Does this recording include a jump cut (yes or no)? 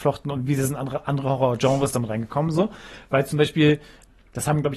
no